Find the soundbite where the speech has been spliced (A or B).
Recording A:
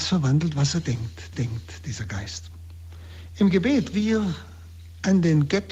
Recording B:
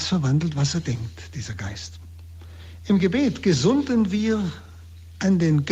A